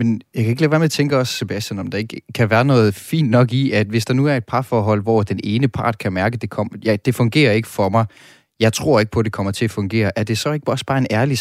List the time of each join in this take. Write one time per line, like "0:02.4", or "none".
none